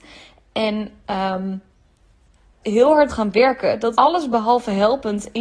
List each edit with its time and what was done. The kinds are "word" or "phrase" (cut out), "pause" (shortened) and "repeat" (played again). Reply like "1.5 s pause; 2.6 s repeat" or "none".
2.6 s word; 3.1 s word; 3.9 s word